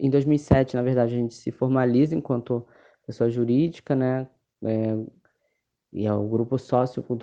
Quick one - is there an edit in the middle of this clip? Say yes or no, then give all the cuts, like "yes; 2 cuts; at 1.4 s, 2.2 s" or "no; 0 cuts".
no; 0 cuts